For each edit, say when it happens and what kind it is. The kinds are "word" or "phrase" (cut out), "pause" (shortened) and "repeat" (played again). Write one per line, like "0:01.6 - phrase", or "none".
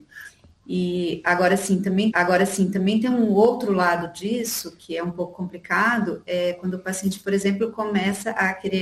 0:02.1 - repeat